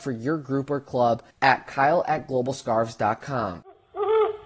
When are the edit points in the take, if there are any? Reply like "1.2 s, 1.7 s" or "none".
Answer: 1.3 s